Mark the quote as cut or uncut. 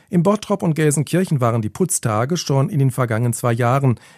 uncut